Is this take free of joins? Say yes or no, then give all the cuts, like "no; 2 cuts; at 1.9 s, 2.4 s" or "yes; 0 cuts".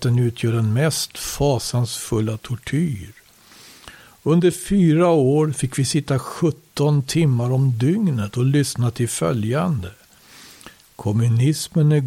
yes; 0 cuts